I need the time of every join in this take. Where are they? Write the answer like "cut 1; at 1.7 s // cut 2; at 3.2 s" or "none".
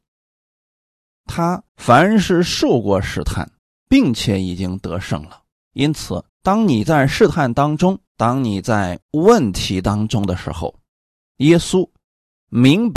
cut 1; at 1.7 s // cut 2; at 3.6 s // cut 3; at 5.5 s // cut 4; at 6.3 s // cut 5; at 8.1 s // cut 6; at 9.0 s